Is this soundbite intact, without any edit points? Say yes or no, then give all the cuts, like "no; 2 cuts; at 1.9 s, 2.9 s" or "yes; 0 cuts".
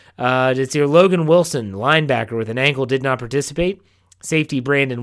yes; 0 cuts